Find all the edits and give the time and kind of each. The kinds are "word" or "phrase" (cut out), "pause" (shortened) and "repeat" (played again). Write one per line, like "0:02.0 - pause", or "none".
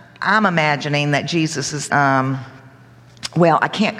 0:01.9 - word